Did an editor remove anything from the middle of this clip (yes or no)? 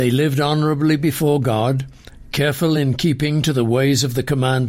no